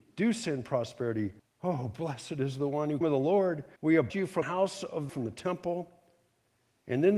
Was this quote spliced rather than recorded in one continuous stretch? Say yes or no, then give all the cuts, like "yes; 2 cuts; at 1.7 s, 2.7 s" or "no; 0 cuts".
yes; 6 cuts; at 1.4 s, 3.0 s, 3.8 s, 4.1 s, 4.4 s, 5.1 s